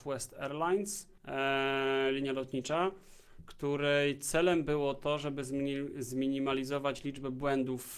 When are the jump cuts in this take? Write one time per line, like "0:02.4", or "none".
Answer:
0:01.2